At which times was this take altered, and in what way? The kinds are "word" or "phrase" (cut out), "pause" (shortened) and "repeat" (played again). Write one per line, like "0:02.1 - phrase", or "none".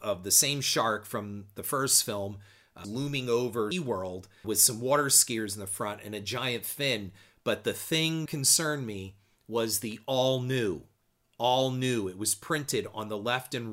0:02.8 - word
0:03.7 - word
0:04.4 - word
0:08.3 - word